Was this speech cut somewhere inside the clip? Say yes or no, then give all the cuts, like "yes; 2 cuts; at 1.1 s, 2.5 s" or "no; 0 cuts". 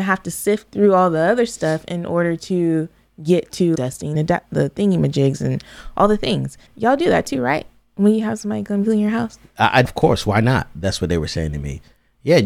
yes; 4 cuts; at 3.7 s, 4.1 s, 6.7 s, 9.8 s